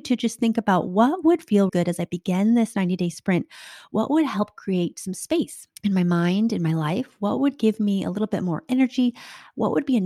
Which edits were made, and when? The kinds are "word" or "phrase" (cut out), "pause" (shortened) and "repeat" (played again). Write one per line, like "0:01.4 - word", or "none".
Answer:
0:01.7 - word
0:05.8 - pause